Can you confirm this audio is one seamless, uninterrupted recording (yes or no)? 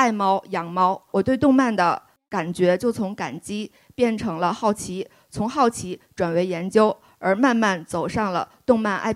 yes